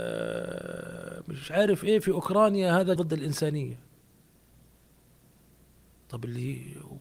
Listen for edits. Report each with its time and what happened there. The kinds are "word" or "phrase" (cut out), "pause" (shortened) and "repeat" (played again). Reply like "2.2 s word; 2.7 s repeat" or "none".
3.0 s word